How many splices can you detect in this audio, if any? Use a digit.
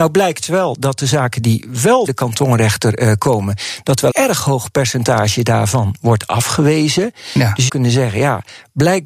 3